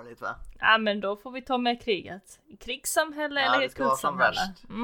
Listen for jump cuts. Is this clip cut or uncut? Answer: uncut